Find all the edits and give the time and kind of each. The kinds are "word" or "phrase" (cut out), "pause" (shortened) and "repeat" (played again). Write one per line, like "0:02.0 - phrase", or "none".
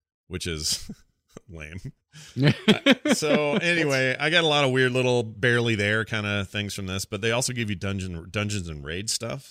0:02.0 - pause